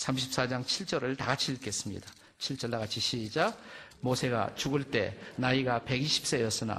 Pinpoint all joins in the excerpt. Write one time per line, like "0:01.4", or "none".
none